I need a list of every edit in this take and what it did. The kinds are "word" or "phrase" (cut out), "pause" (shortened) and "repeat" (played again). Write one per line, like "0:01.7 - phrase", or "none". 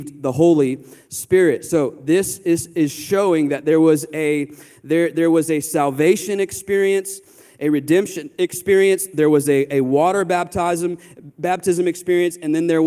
none